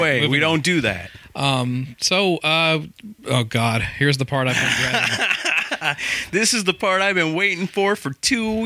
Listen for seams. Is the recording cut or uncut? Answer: uncut